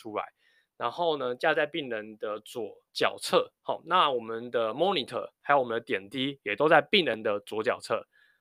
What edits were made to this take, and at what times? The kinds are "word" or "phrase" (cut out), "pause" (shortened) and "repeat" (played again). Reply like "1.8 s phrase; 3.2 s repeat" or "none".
2.9 s pause; 3.6 s pause